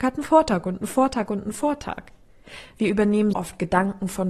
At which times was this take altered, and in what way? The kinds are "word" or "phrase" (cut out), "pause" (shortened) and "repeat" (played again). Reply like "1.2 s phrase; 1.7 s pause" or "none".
3.3 s word